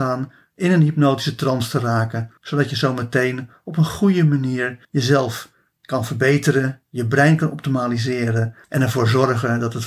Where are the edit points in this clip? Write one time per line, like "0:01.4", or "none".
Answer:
0:02.4
0:04.8
0:08.6

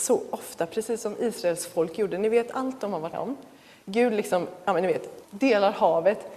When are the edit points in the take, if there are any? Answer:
0:03.1
0:05.2

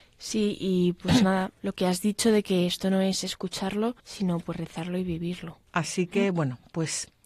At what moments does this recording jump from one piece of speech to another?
0:04.0
0:05.7

